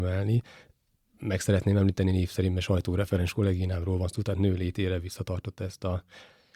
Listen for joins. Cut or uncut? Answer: uncut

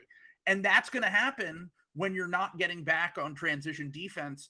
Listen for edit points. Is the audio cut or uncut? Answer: uncut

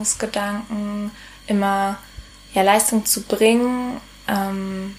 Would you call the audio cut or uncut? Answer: uncut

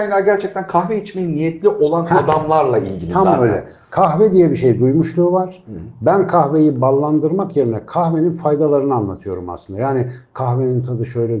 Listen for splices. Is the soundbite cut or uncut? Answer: uncut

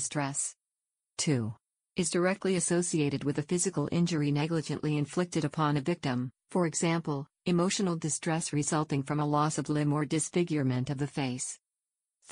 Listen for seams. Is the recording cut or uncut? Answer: uncut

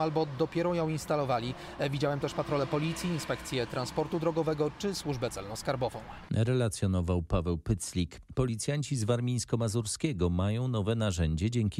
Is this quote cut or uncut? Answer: uncut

